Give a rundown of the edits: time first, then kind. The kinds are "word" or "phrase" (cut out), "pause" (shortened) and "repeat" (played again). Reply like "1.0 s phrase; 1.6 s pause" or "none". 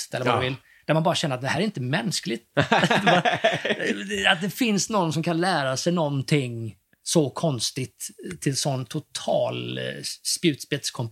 none